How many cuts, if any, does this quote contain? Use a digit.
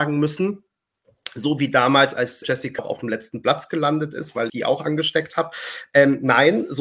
3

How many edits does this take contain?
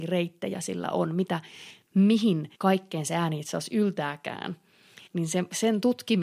2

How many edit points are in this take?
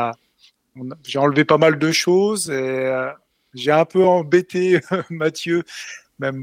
0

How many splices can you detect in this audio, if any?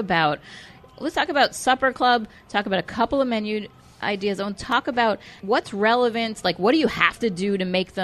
1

